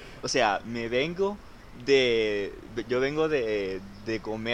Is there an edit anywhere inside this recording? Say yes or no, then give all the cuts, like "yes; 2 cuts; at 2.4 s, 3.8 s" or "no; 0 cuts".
no; 0 cuts